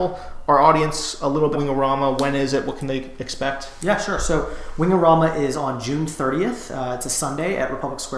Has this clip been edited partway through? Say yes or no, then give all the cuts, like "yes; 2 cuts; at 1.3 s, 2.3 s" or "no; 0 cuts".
yes; 1 cut; at 1.5 s